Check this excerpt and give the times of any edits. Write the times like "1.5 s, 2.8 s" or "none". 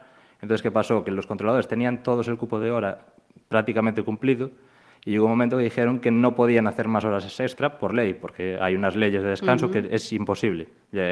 none